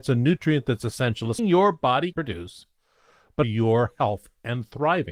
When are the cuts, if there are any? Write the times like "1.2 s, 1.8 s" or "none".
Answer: 1.4 s, 2.1 s, 3.4 s